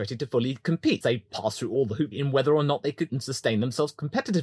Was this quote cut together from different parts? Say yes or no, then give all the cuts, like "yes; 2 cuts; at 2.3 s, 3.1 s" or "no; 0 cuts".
yes; 3 cuts; at 1.0 s, 2.1 s, 3.1 s